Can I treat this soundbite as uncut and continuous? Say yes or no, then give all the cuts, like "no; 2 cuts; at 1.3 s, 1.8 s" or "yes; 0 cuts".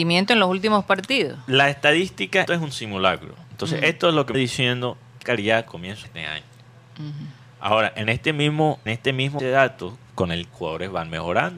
no; 9 cuts; at 2.5 s, 4.3 s, 5.2 s, 5.7 s, 6.0 s, 8.9 s, 9.4 s, 10.1 s, 10.5 s